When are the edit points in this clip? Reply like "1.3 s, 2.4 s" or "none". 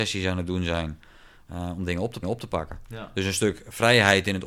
2.2 s